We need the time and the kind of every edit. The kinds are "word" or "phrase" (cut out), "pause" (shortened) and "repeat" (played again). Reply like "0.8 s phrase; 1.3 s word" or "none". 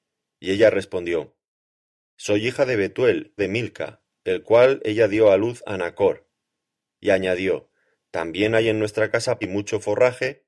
3.4 s word; 9.4 s word